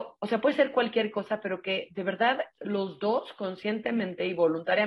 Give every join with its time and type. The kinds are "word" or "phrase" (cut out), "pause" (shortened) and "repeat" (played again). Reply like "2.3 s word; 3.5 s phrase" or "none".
2.5 s pause